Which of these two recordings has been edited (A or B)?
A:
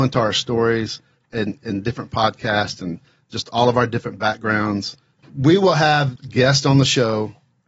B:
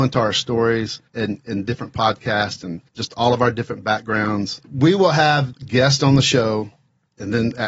B